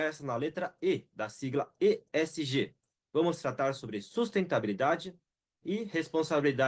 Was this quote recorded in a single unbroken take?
yes; 0 cuts

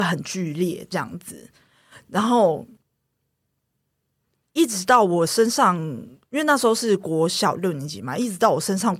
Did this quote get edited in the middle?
no; 0 cuts

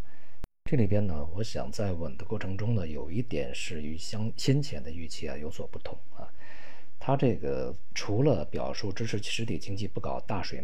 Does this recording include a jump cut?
no; 0 cuts

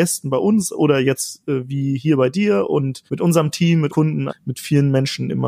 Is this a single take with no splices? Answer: no; 3 cuts; at 3.1 s, 3.9 s, 4.3 s

